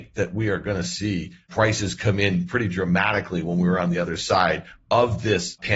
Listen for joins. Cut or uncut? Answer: uncut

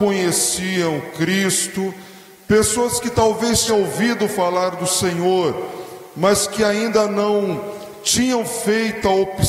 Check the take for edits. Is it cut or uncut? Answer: cut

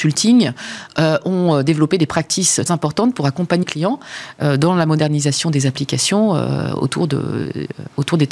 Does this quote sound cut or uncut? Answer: cut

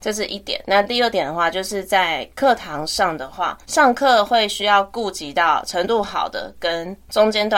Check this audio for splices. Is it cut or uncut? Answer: cut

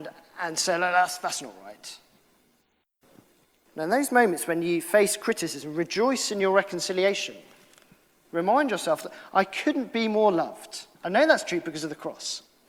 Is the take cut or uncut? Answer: cut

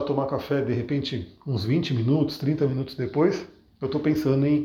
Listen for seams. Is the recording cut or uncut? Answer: uncut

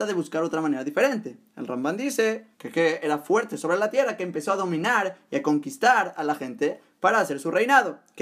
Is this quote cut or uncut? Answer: cut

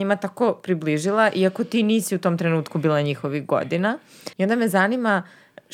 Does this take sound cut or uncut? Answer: cut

